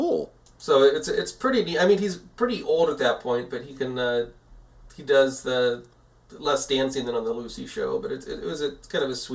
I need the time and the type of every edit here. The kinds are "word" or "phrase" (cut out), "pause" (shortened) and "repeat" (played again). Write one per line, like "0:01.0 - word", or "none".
none